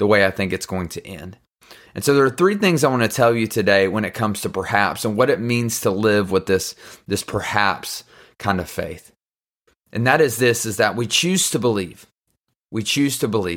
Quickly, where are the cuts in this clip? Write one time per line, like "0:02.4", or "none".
none

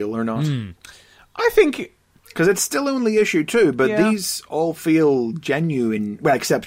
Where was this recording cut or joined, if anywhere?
none

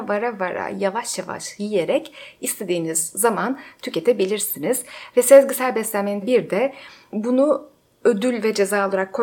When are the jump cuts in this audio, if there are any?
0:06.2

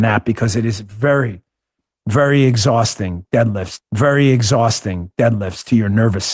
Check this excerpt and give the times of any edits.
0:03.8

